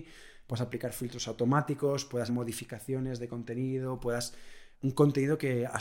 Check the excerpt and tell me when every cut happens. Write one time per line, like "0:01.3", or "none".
0:02.3
0:04.7